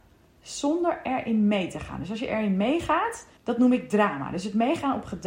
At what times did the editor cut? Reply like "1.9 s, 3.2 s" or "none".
3.4 s